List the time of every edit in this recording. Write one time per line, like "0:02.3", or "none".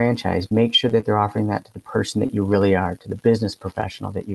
none